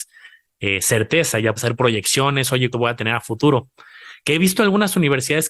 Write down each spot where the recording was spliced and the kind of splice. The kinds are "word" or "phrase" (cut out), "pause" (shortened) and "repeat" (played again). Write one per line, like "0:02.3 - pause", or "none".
0:01.6 - word
0:02.7 - word